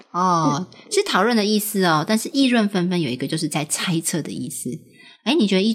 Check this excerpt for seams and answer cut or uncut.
uncut